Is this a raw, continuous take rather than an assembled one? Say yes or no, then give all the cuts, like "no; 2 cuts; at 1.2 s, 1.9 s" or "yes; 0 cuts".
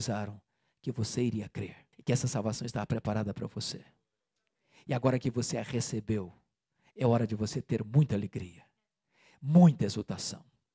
no; 1 cut; at 1.9 s